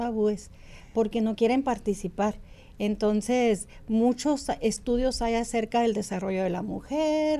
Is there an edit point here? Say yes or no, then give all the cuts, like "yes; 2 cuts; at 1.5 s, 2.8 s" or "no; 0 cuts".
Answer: no; 0 cuts